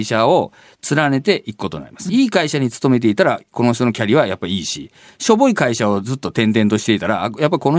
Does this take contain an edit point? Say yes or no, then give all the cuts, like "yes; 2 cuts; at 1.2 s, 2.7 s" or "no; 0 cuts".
yes; 1 cut; at 2.1 s